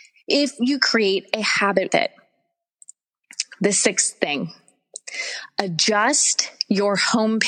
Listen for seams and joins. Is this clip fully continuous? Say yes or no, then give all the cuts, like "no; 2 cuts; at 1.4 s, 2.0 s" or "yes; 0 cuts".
no; 1 cut; at 1.9 s